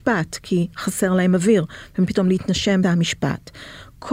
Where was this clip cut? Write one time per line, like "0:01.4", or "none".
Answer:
0:02.1
0:02.8